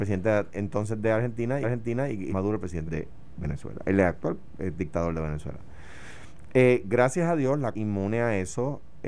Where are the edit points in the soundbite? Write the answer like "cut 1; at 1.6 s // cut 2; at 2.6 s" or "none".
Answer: cut 1; at 1.6 s // cut 2; at 2.3 s // cut 3; at 2.9 s // cut 4; at 7.7 s